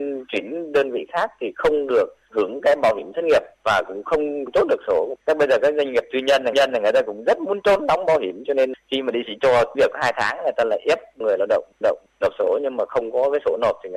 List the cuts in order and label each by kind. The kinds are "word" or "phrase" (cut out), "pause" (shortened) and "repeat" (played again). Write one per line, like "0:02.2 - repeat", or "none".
0:03.5 - pause
0:05.2 - pause
0:06.5 - repeat
0:09.2 - phrase
0:09.7 - word
0:11.8 - repeat